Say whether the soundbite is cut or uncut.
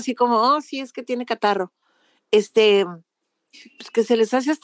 uncut